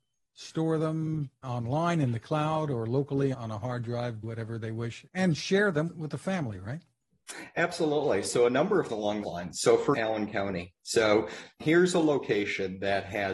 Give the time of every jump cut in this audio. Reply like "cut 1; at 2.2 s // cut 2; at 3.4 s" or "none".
cut 1; at 1.4 s // cut 2; at 3.3 s // cut 3; at 4.2 s // cut 4; at 5.1 s // cut 5; at 5.9 s // cut 6; at 8.9 s // cut 7; at 9.2 s // cut 8; at 9.9 s // cut 9; at 11.6 s

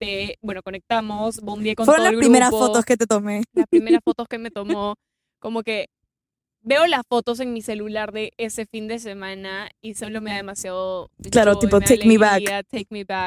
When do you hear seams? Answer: none

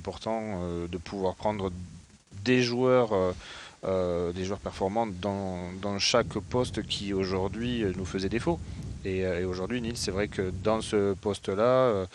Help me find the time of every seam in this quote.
none

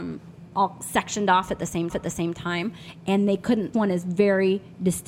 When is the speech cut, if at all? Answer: cut 1; at 1.9 s // cut 2; at 3.7 s

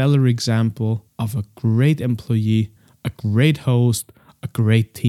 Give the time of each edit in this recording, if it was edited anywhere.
none

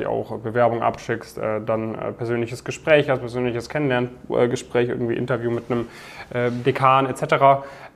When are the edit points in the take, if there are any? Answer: none

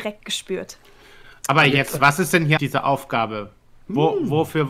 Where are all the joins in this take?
cut 1; at 2.0 s // cut 2; at 2.6 s

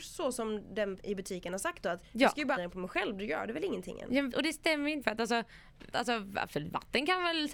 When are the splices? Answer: cut 1; at 1.0 s // cut 2; at 2.0 s // cut 3; at 2.6 s // cut 4; at 4.3 s // cut 5; at 5.0 s // cut 6; at 5.9 s

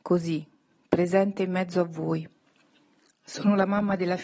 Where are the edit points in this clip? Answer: cut 1; at 3.0 s

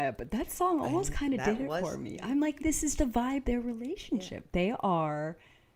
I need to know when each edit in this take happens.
cut 1; at 2.6 s // cut 2; at 3.0 s // cut 3; at 3.4 s

